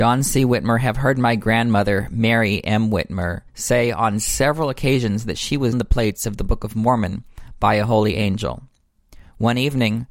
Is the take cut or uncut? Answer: cut